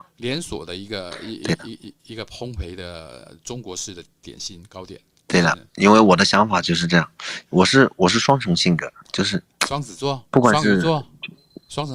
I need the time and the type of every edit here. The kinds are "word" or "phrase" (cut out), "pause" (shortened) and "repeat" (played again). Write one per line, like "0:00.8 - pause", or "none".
0:05.1 - pause
0:07.5 - pause